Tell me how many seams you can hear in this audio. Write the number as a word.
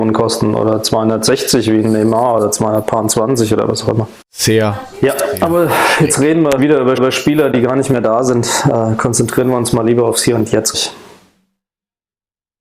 four